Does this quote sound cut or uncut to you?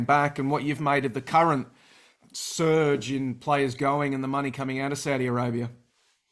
uncut